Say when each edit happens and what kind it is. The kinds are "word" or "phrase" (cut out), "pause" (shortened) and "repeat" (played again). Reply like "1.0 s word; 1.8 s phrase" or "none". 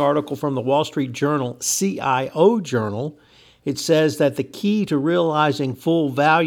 none